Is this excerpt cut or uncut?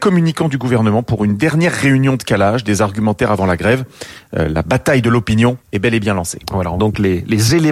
cut